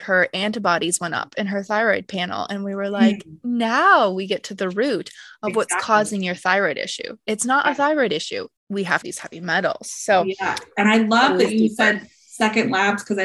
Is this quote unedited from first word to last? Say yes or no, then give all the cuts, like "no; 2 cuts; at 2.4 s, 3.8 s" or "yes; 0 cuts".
no; 2 cuts; at 8.6 s, 9.0 s